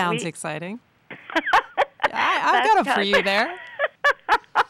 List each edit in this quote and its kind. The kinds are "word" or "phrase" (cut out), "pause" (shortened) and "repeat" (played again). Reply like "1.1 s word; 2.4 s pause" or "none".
2.8 s word